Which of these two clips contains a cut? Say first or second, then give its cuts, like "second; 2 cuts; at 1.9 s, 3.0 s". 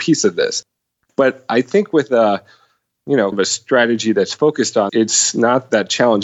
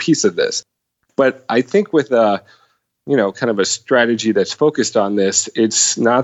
first; 2 cuts; at 3.3 s, 4.9 s